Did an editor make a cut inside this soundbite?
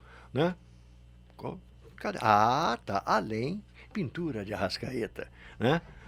yes; 1 cut; at 3.9 s

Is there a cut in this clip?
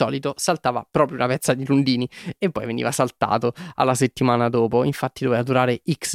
no; 0 cuts

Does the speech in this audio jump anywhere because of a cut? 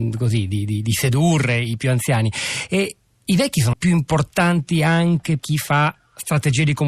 yes; 2 cuts; at 3.7 s, 5.4 s

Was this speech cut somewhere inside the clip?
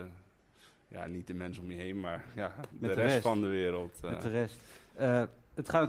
no; 0 cuts

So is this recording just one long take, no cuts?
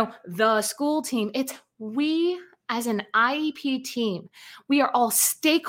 yes; 0 cuts

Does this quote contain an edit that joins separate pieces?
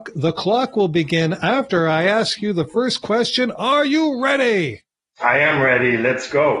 no; 0 cuts

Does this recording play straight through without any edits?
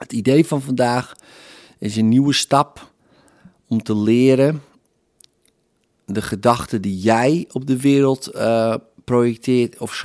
yes; 0 cuts

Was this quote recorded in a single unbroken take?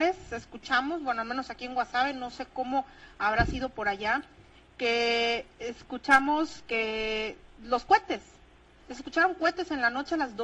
yes; 0 cuts

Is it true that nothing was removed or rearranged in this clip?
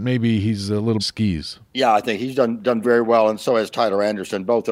no; 3 cuts; at 1.0 s, 1.6 s, 2.8 s

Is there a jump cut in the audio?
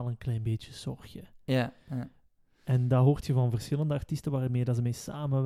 no; 0 cuts

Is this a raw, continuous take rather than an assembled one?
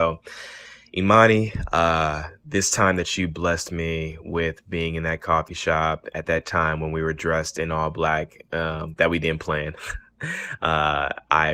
yes; 0 cuts

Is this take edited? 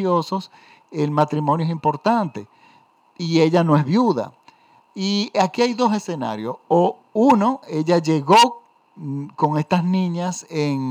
no; 0 cuts

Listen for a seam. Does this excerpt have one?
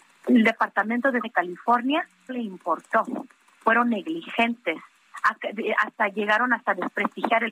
yes; 2 cuts; at 1.2 s, 2.3 s

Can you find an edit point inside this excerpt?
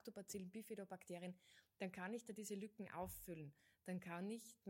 no; 0 cuts

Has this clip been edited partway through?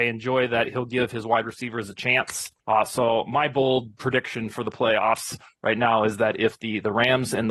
yes; 1 cut; at 2.6 s

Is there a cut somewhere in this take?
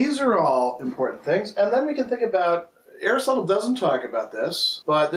no; 0 cuts

